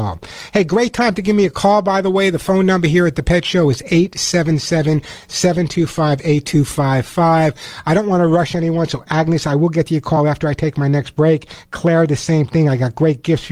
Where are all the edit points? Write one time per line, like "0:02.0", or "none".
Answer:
none